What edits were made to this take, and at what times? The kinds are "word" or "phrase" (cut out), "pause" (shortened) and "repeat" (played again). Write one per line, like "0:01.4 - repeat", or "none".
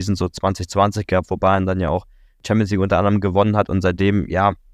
none